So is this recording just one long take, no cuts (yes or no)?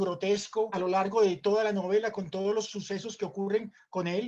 yes